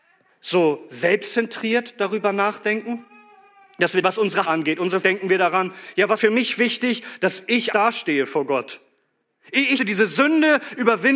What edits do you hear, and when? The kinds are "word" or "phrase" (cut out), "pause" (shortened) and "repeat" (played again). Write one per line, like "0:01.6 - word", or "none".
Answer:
0:04.0 - word
0:04.4 - word
0:05.0 - word
0:06.2 - word
0:07.7 - word
0:09.8 - word